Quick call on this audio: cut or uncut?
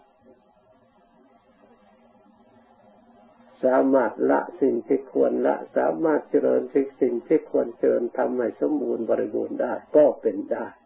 cut